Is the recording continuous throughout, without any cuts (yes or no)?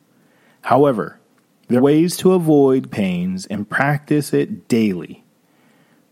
no